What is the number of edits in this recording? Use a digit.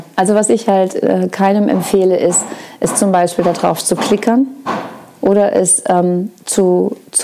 0